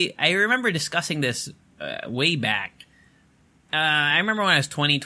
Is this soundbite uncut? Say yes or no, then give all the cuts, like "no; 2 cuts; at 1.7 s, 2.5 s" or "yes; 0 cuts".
yes; 0 cuts